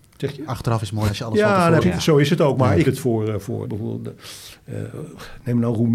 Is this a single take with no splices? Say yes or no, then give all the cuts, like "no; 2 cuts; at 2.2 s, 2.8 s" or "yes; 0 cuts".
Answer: no; 4 cuts; at 1.1 s, 1.8 s, 2.8 s, 3.6 s